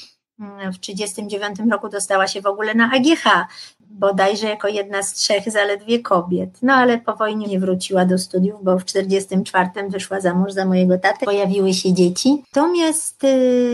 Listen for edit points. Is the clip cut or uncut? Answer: cut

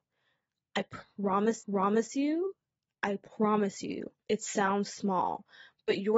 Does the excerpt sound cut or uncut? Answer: cut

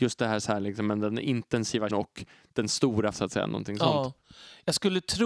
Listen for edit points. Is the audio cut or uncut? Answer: cut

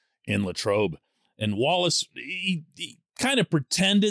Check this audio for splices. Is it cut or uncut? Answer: uncut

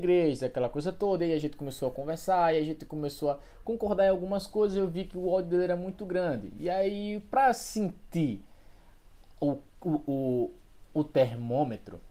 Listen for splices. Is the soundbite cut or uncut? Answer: uncut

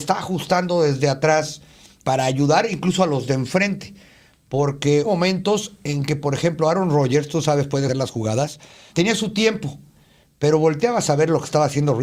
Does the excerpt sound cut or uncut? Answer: cut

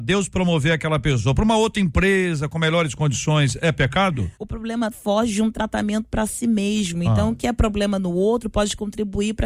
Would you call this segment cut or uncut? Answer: cut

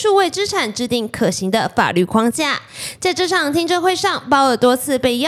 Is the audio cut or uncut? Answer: uncut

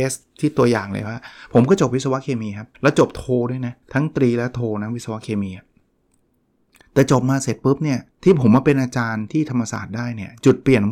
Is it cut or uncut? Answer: cut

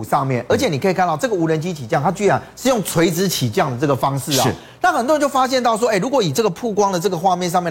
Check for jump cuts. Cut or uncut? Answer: uncut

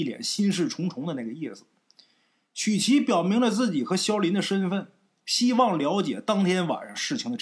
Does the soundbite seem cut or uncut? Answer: uncut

